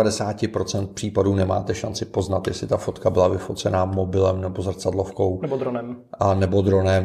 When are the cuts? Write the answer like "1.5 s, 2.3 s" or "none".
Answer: none